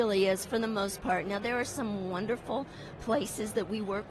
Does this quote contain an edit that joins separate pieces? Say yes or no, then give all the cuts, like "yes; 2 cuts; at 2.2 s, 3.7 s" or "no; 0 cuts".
no; 0 cuts